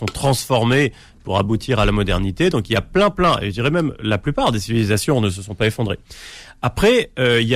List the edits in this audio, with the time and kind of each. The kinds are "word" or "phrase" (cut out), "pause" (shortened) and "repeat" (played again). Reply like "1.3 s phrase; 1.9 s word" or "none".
none